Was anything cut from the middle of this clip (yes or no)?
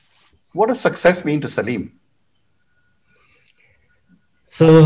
no